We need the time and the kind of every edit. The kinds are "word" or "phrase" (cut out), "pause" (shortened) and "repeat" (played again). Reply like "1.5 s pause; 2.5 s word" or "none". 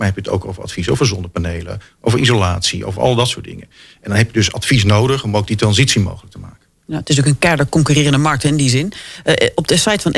none